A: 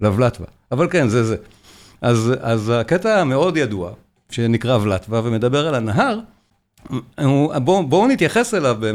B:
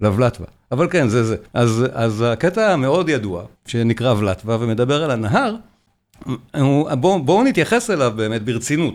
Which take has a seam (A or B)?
B